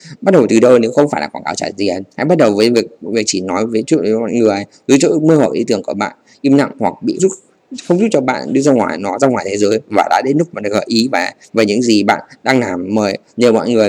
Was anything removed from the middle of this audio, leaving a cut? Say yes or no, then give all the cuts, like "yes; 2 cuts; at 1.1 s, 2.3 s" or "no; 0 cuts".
yes; 2 cuts; at 2.1 s, 7.2 s